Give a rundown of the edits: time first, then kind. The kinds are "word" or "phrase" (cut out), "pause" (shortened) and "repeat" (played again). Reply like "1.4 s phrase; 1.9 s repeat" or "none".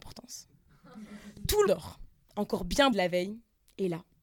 1.7 s word; 2.9 s word